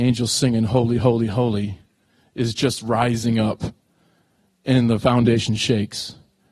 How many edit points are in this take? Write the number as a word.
zero